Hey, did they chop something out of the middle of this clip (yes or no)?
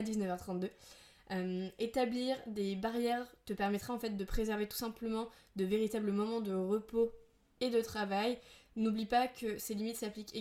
no